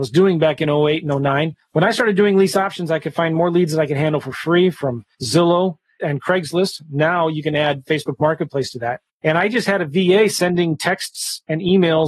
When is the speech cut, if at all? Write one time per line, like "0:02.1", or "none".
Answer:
none